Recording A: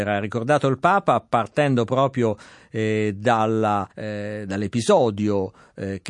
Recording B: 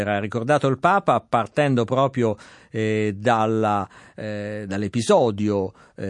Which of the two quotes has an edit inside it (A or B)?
A